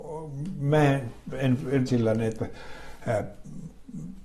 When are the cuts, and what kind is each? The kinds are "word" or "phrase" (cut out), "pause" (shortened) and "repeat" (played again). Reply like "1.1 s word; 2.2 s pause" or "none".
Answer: 1.9 s phrase